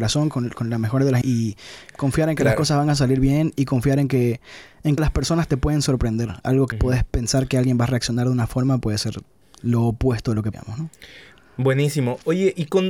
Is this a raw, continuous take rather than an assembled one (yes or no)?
no